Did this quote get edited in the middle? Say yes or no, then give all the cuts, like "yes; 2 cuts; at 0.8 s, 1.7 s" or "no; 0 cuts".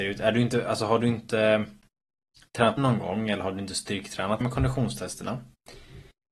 yes; 2 cuts; at 2.8 s, 4.4 s